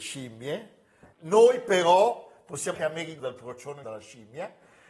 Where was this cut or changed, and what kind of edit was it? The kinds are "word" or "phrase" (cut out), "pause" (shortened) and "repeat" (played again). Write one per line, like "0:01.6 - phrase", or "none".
0:01.1 - pause
0:02.7 - word
0:03.2 - word
0:03.8 - word